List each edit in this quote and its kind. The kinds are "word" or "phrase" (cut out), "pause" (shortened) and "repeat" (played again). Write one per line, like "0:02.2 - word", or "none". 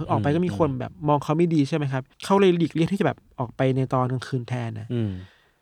0:02.1 - pause